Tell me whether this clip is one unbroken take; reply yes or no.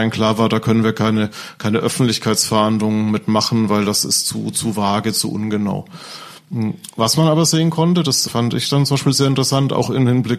yes